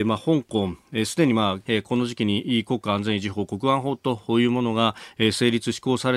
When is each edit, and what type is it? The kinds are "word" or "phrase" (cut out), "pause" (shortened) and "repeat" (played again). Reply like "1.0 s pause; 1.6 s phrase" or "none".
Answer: 1.7 s phrase